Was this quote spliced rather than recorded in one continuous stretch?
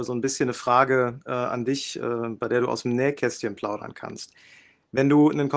no; 0 cuts

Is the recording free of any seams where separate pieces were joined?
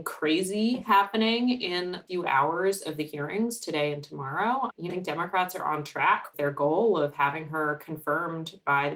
no; 3 cuts; at 2.1 s, 4.9 s, 6.3 s

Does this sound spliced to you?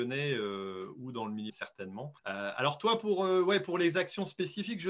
yes; 2 cuts; at 1.5 s, 2.2 s

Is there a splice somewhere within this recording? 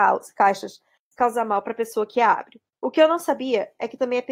yes; 1 cut; at 2.7 s

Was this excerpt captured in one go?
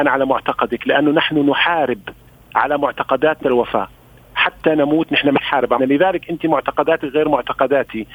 no; 2 cuts; at 3.4 s, 5.8 s

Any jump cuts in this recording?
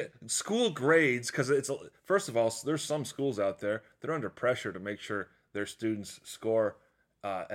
no; 0 cuts

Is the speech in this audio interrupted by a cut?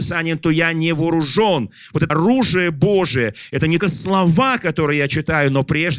yes; 2 cuts; at 2.1 s, 3.8 s

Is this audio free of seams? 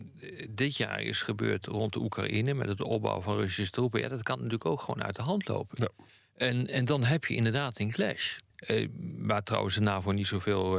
no; 2 cuts; at 6.1 s, 8.5 s

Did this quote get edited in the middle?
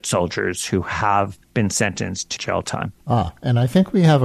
yes; 3 cuts; at 1.4 s, 2.4 s, 3.0 s

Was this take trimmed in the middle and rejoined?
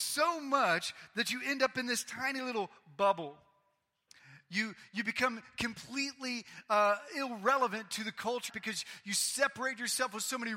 yes; 1 cut; at 8.5 s

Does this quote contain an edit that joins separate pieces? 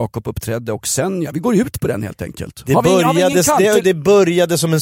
no; 0 cuts

